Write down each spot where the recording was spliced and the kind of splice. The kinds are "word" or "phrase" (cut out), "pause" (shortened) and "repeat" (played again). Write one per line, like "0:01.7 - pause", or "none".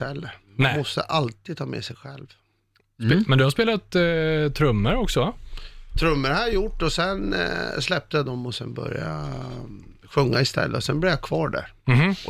none